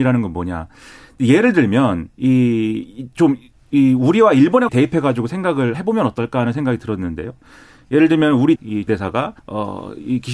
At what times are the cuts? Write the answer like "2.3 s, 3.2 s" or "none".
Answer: 2.1 s, 4.7 s, 5.7 s, 8.6 s, 8.9 s, 9.4 s